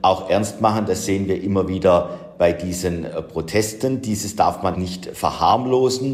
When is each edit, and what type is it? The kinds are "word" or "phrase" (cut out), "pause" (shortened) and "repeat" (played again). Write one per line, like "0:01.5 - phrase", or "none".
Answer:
0:04.7 - word